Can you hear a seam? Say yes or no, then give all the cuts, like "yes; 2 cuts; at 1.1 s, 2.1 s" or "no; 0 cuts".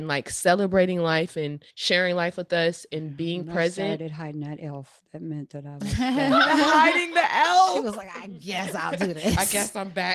yes; 1 cut; at 1.7 s